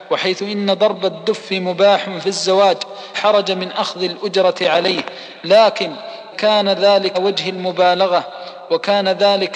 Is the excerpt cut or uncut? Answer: cut